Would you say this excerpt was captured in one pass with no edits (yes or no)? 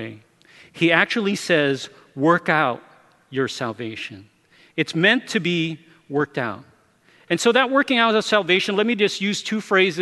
yes